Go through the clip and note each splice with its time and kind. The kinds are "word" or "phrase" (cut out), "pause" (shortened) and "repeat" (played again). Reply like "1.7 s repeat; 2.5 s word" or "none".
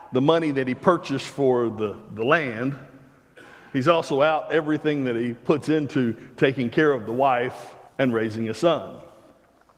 7.9 s pause